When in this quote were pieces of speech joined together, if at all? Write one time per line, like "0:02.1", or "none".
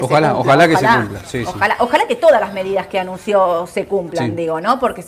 none